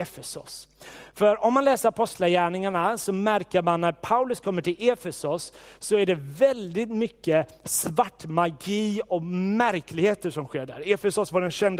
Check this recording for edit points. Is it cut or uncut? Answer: uncut